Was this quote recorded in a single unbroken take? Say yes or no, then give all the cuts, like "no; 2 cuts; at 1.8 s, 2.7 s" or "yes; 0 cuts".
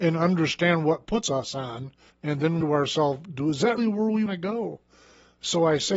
no; 5 cuts; at 1.1 s, 2.1 s, 2.6 s, 3.8 s, 4.3 s